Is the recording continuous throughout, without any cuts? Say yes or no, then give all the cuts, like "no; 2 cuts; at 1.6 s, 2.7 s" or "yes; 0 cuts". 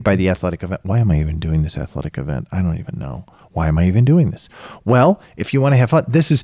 yes; 0 cuts